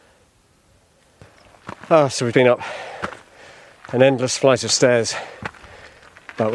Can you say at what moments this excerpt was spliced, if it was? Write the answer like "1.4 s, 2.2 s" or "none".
2.3 s

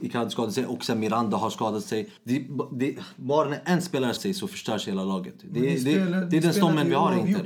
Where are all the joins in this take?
2.2 s, 4.2 s

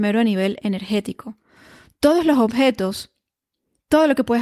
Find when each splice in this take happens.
none

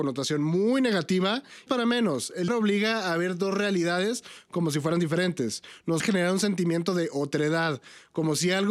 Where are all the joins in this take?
1.7 s, 2.5 s, 6.0 s

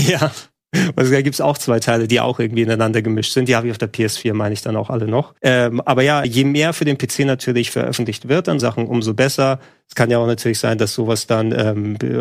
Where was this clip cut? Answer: 5.4 s, 6.2 s, 8.6 s

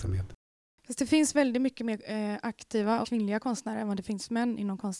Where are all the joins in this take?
3.0 s

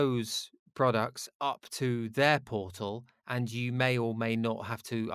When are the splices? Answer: none

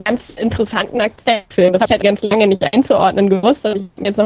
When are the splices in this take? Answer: 1.5 s, 2.0 s

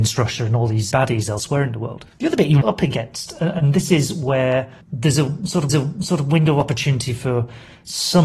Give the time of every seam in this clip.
0.9 s, 2.1 s, 2.6 s, 4.8 s, 5.7 s

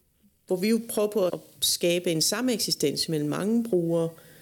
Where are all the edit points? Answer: 1.3 s

